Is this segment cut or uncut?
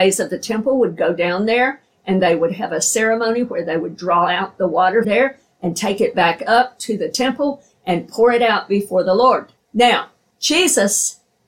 cut